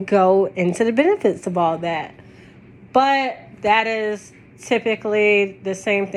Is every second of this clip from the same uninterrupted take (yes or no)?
yes